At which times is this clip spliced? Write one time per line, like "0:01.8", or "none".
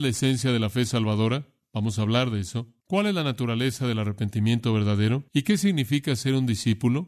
0:02.8
0:05.3